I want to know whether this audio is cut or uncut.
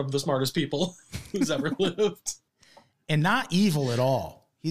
uncut